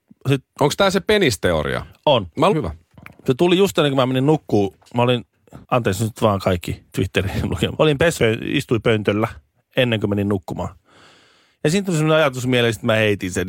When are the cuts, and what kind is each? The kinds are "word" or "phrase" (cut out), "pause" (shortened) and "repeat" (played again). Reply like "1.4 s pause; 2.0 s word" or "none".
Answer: 2.5 s phrase; 2.9 s pause; 5.6 s pause; 6.9 s pause; 7.8 s word; 8.2 s phrase